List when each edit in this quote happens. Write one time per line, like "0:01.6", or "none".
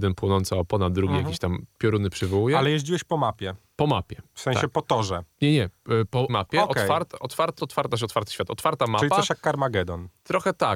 0:06.3
0:07.6